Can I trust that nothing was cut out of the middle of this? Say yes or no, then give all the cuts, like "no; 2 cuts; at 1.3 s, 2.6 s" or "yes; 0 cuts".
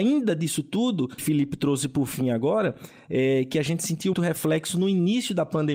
no; 2 cuts; at 1.2 s, 4.1 s